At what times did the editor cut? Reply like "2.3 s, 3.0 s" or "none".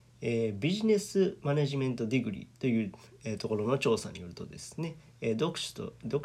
2.5 s